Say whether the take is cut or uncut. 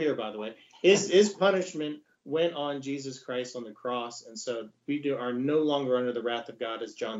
uncut